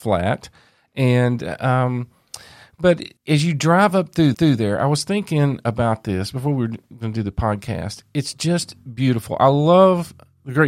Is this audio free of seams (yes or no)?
no